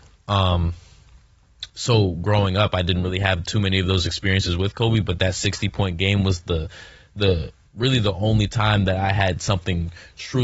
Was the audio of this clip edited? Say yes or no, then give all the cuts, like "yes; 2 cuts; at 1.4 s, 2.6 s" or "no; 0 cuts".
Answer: no; 0 cuts